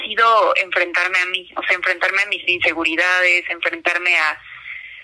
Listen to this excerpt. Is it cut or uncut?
uncut